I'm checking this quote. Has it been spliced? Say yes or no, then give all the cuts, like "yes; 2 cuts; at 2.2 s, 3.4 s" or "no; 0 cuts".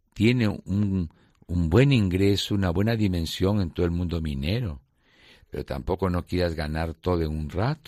no; 0 cuts